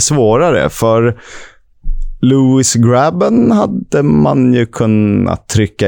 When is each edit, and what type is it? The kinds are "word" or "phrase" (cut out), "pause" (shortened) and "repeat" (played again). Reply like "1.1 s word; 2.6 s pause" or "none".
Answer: none